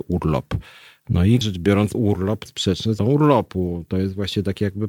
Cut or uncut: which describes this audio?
cut